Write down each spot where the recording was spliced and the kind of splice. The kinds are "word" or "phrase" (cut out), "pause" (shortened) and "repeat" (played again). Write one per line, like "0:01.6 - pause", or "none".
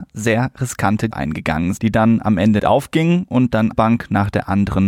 0:01.1 - word
0:01.8 - word
0:02.6 - word
0:03.7 - word